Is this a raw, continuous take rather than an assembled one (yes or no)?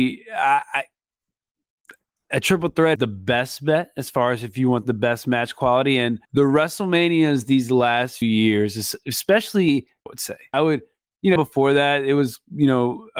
no